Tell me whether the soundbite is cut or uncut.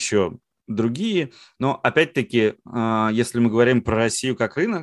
uncut